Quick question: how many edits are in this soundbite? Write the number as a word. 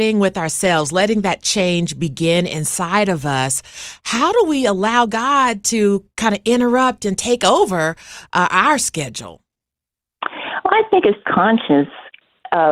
one